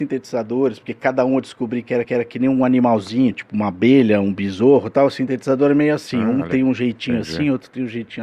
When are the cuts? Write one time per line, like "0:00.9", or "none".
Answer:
0:02.0